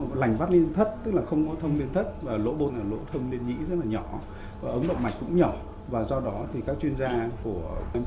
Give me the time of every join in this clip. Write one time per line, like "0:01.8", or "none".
0:02.7